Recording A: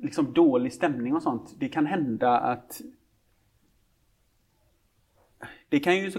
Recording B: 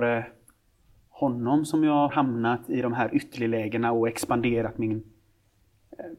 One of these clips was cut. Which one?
B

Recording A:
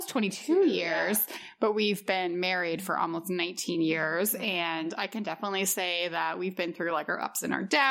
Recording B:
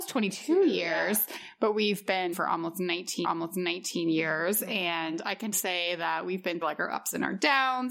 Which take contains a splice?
B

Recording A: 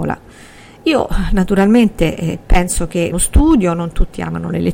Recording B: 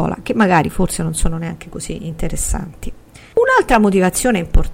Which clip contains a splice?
A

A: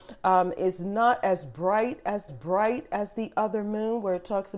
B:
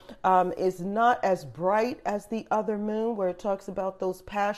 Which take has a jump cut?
A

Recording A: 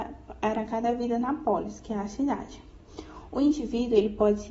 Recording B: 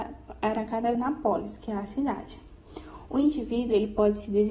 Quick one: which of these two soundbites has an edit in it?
B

